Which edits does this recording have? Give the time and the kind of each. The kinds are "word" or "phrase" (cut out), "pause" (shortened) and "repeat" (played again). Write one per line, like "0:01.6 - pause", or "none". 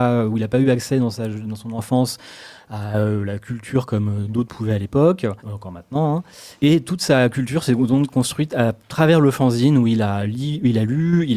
0:05.4 - pause
0:06.5 - pause